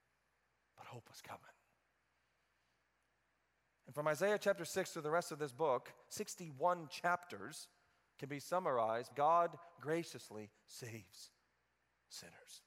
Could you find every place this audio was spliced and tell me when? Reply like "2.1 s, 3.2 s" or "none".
9.1 s

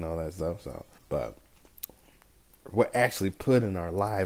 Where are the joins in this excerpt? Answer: 1.0 s

